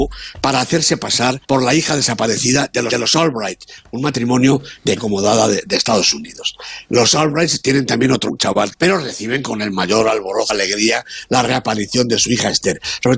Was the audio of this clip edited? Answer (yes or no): yes